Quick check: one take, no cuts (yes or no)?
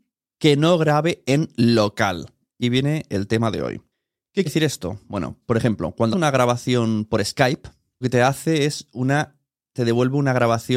no